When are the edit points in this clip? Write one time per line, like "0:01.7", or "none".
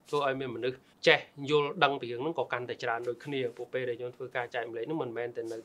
0:00.9